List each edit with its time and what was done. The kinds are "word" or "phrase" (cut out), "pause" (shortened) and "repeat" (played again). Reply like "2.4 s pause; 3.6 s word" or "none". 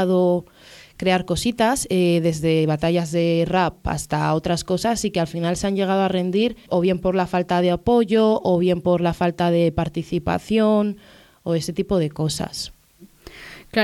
6.7 s word